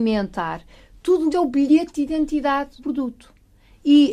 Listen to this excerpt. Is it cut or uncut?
cut